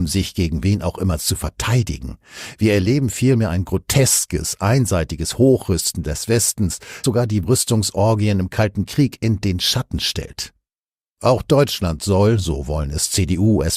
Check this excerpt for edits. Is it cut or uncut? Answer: cut